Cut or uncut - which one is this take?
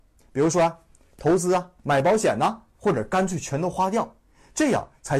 cut